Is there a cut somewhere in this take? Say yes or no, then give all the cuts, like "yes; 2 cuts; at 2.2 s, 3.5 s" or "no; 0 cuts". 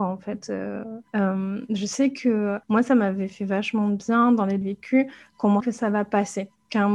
yes; 4 cuts; at 1.1 s, 2.6 s, 4.6 s, 5.6 s